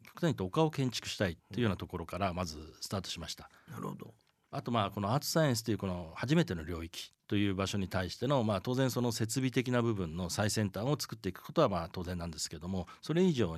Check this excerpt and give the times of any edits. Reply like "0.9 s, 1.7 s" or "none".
1.4 s